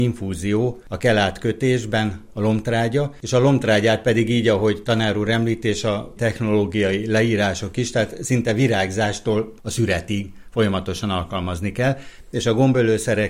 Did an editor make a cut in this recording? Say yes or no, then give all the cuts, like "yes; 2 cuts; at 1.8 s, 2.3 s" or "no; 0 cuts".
yes; 1 cut; at 6.2 s